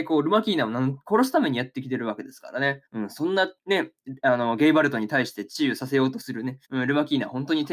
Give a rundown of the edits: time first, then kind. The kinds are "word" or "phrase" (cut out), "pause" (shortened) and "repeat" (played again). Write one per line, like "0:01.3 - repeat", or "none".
0:02.9 - pause
0:03.6 - pause
0:06.6 - pause